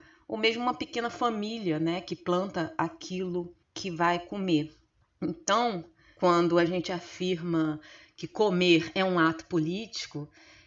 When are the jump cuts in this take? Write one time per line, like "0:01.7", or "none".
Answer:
0:03.6